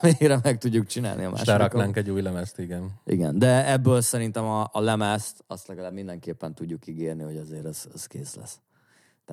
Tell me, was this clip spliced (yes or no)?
no